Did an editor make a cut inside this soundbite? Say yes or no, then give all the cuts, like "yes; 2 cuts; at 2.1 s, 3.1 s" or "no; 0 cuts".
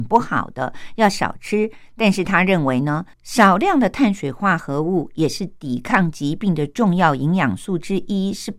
yes; 1 cut; at 3.1 s